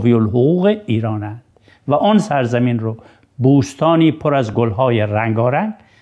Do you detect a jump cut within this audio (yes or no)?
no